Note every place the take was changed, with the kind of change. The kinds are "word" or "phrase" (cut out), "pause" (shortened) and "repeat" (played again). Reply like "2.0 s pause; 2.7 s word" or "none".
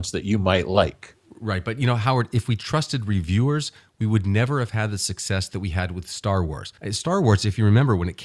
6.8 s pause